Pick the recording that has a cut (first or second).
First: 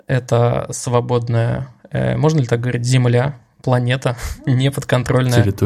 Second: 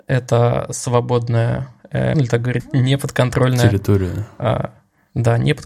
second